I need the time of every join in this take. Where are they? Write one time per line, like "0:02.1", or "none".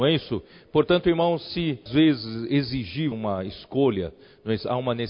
0:01.9
0:03.1